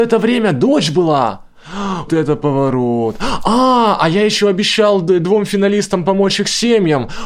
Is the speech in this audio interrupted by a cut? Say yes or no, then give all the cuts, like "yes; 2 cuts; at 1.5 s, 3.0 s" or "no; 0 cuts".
yes; 1 cut; at 2.1 s